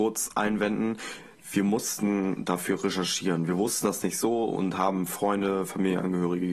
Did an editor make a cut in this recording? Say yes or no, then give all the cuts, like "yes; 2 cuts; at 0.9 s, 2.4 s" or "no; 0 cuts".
no; 0 cuts